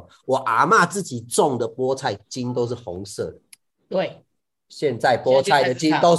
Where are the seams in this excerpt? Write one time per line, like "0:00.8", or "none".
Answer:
none